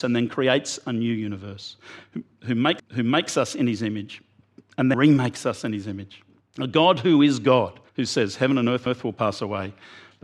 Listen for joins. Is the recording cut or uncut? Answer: cut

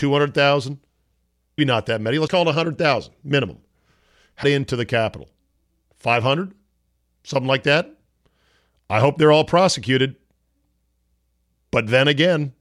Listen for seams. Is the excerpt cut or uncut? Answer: cut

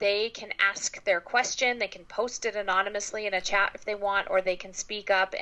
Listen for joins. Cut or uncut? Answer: uncut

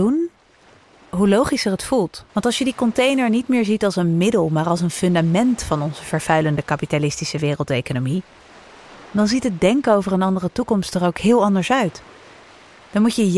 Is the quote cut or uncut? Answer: cut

